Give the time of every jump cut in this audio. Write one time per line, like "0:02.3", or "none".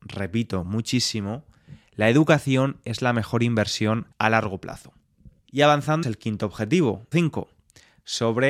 0:04.1
0:05.4
0:06.0
0:07.1